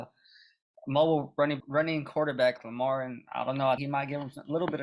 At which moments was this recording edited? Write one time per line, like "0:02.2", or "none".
0:01.6
0:02.6
0:03.8